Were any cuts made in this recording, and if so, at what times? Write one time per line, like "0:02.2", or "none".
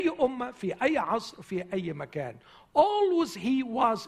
none